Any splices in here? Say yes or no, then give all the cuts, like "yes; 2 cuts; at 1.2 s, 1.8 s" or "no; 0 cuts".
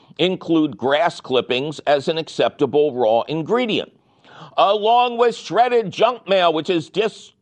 no; 0 cuts